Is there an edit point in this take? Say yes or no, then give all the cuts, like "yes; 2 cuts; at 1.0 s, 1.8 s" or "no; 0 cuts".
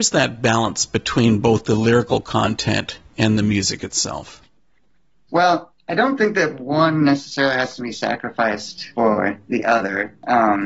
no; 0 cuts